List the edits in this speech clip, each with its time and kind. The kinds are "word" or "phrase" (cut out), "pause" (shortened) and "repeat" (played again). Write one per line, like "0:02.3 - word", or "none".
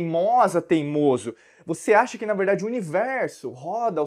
none